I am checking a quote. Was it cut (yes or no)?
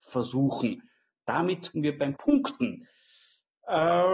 yes